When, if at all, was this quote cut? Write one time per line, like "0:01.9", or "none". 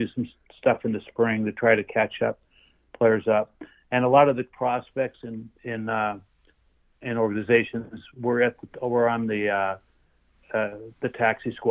none